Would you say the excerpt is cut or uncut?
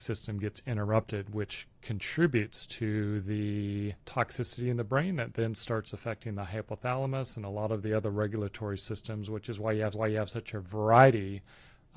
cut